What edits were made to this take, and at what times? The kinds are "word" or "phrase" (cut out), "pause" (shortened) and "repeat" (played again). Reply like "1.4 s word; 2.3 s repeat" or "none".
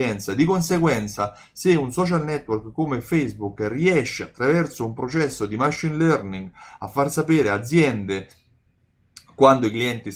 none